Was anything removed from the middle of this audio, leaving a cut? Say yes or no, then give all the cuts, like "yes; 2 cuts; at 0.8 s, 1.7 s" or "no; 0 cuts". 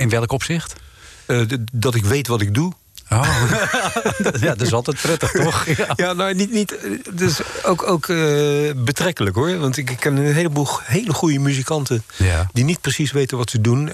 no; 0 cuts